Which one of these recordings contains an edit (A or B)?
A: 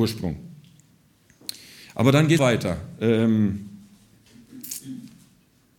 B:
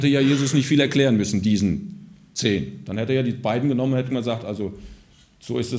A